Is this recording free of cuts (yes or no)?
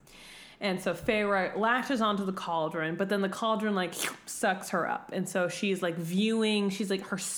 yes